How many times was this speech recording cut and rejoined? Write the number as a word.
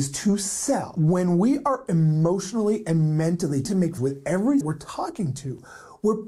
three